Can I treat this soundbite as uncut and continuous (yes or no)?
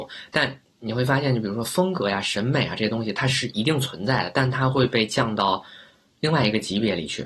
yes